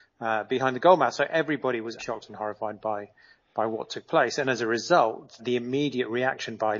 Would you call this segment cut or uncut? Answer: cut